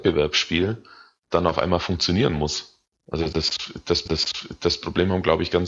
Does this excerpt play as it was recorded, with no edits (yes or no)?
no